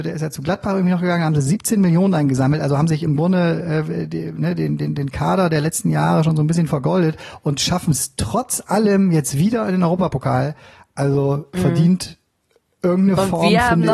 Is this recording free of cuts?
yes; 0 cuts

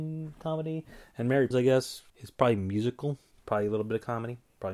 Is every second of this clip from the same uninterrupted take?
no; 3 cuts; at 1.5 s, 2.1 s, 3.3 s

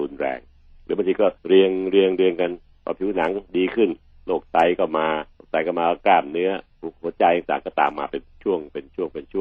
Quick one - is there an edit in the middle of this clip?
yes; 3 cuts; at 1.4 s, 3.5 s, 5.3 s

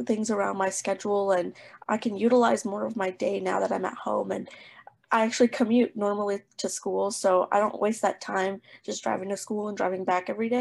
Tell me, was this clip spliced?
no; 0 cuts

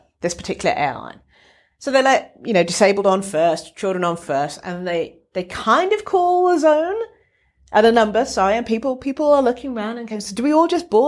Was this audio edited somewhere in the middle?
no; 0 cuts

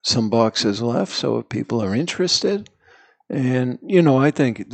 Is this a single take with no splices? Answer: yes; 0 cuts

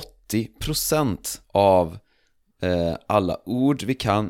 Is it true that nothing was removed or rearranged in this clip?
no; 1 cut; at 1.4 s

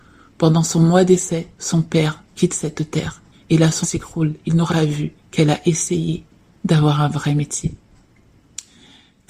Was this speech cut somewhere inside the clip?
yes; 6 cuts; at 1.5 s, 2.3 s, 3.3 s, 3.8 s, 4.7 s, 5.2 s

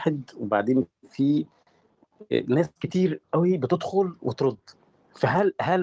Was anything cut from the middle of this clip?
no; 0 cuts

